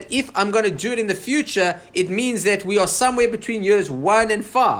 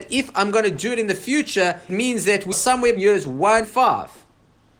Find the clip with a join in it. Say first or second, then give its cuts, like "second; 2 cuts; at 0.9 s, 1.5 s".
second; 4 cuts; at 1.9 s, 2.5 s, 3.0 s, 3.6 s